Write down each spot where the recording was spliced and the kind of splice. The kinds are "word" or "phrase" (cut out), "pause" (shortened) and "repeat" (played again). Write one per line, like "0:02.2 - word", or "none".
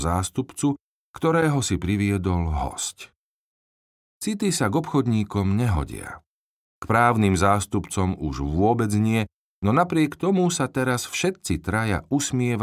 none